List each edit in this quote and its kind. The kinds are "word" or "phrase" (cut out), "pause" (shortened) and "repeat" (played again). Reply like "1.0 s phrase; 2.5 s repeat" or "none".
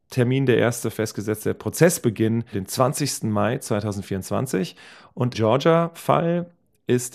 2.5 s word; 5.3 s word